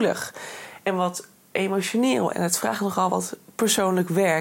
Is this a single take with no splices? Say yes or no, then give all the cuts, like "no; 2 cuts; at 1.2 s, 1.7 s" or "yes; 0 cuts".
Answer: yes; 0 cuts